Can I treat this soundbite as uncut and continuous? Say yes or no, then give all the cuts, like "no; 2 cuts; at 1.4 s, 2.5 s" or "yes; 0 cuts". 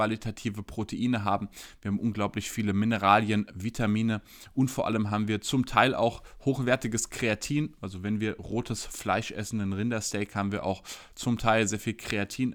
yes; 0 cuts